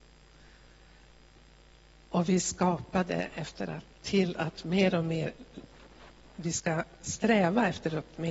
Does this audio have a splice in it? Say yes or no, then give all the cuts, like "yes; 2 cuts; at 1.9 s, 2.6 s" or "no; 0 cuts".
no; 0 cuts